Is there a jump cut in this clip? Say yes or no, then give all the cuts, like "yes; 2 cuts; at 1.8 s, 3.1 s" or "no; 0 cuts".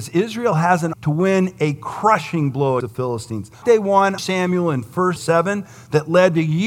yes; 5 cuts; at 0.9 s, 2.8 s, 3.6 s, 4.2 s, 5.2 s